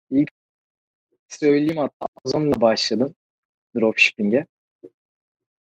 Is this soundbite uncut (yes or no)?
yes